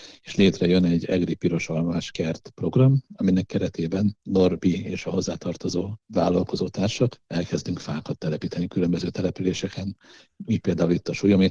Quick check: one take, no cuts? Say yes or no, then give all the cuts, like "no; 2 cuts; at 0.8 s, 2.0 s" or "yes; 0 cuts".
no; 1 cut; at 7.2 s